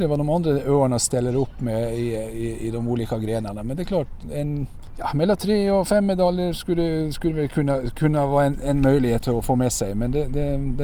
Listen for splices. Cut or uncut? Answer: cut